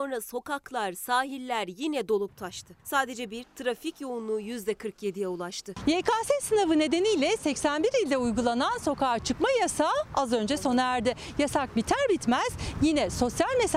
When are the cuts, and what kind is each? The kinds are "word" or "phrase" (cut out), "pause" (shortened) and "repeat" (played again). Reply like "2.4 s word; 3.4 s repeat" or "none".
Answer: 2.8 s pause; 3.4 s word